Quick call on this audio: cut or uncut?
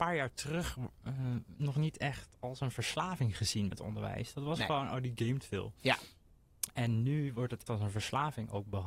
cut